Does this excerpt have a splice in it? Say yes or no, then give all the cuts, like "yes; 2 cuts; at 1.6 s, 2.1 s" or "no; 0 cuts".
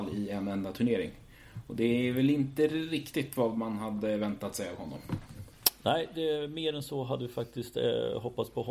no; 0 cuts